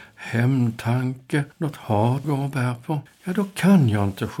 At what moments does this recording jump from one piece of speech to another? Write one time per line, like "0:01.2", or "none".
0:01.5
0:02.2
0:03.1